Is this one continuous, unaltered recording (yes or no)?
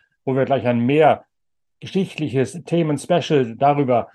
yes